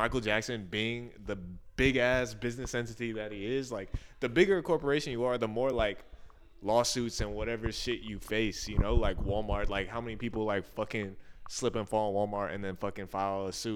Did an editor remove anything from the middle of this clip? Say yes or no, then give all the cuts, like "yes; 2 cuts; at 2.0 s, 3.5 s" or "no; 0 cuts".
no; 0 cuts